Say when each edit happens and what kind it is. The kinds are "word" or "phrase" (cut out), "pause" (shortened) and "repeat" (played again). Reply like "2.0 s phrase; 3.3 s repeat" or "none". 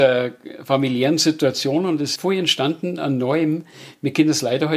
2.2 s word